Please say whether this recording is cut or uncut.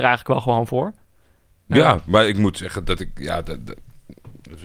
uncut